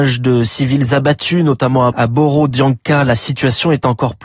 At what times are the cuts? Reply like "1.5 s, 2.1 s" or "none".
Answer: 1.9 s